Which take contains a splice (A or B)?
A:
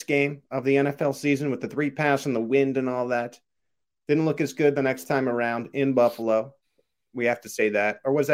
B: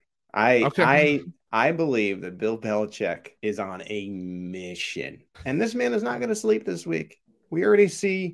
B